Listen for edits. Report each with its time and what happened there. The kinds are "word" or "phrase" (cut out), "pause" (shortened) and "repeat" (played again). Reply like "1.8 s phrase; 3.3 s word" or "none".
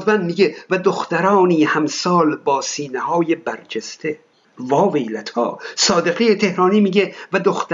4.3 s pause